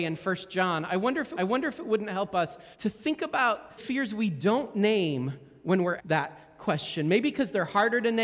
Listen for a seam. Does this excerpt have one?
yes; 4 cuts; at 1.4 s, 2.7 s, 3.8 s, 6.0 s

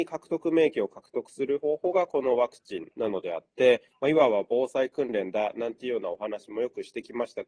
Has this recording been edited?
yes; 1 cut; at 2.9 s

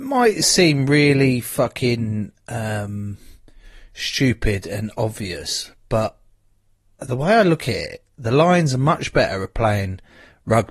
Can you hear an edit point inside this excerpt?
no; 0 cuts

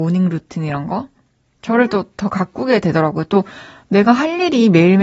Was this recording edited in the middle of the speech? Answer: no; 0 cuts

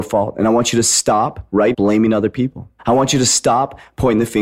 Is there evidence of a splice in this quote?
yes; 2 cuts; at 1.7 s, 2.8 s

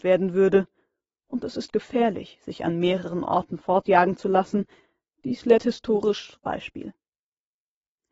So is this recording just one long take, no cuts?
no; 1 cut; at 6.4 s

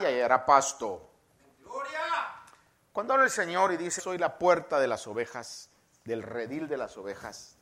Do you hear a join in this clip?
yes; 1 cut; at 4.0 s

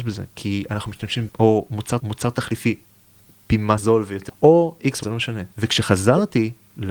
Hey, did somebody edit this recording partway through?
yes; 6 cuts; at 1.3 s, 2.0 s, 3.8 s, 4.3 s, 5.0 s, 5.5 s

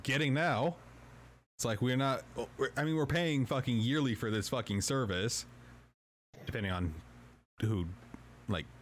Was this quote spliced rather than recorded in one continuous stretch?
no; 0 cuts

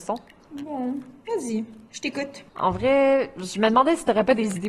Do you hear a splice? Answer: yes; 2 cuts; at 1.9 s, 2.5 s

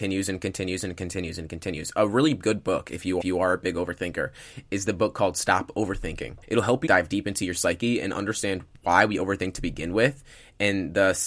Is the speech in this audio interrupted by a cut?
yes; 3 cuts; at 3.2 s, 6.4 s, 6.9 s

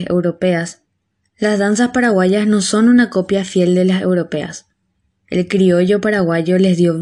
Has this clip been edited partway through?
no; 0 cuts

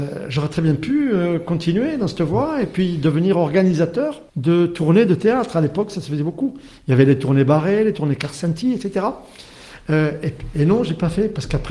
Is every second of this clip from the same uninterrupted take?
no; 1 cut; at 4.3 s

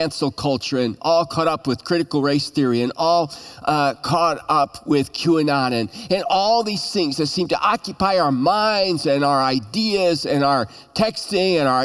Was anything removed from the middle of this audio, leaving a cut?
no; 0 cuts

